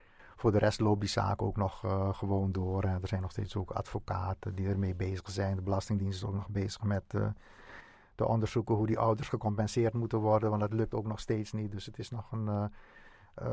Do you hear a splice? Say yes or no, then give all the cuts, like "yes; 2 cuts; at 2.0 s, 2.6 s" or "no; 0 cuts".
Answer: no; 0 cuts